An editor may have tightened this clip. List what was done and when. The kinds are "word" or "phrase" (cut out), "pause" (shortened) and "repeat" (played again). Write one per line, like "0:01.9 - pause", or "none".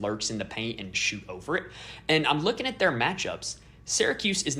0:00.9 - phrase